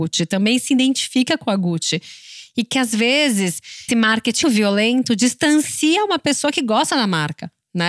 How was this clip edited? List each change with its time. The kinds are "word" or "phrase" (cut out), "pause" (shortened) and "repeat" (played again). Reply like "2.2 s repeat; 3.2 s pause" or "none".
3.9 s word; 4.4 s word